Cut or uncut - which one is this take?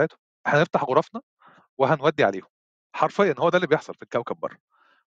uncut